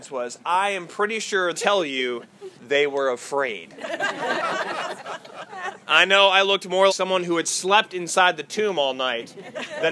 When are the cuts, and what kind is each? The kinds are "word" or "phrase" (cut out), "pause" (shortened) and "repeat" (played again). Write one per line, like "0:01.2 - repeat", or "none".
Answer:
0:01.5 - phrase
0:02.6 - pause
0:06.9 - word